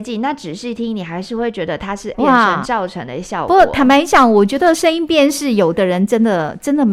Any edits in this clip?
yes; 1 cut; at 2.1 s

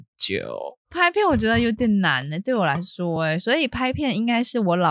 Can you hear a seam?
no; 0 cuts

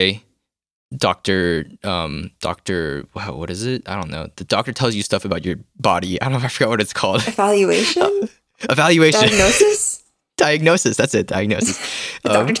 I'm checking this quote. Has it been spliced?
no; 0 cuts

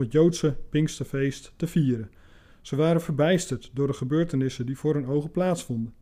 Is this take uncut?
yes; 0 cuts

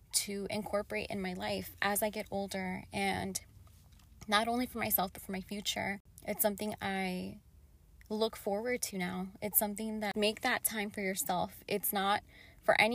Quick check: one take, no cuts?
no; 1 cut; at 10.1 s

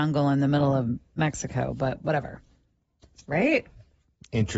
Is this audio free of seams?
yes; 0 cuts

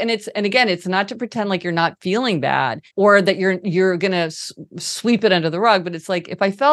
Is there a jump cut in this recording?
yes; 1 cut; at 2.9 s

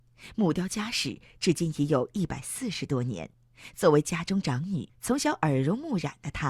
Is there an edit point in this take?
yes; 1 cut; at 4.9 s

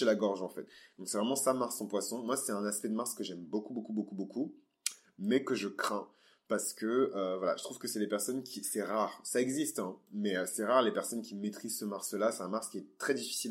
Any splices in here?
no; 0 cuts

